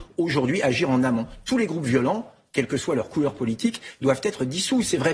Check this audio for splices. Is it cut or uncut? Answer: uncut